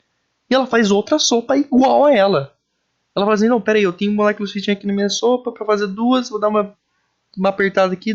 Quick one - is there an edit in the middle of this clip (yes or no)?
no